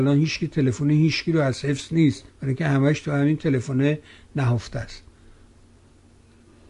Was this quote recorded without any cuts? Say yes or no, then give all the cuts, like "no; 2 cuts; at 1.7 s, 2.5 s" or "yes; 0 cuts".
no; 1 cut; at 2.3 s